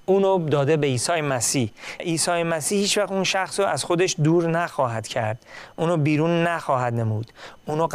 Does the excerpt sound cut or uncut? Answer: cut